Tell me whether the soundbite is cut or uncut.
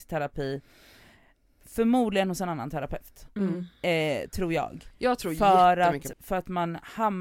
cut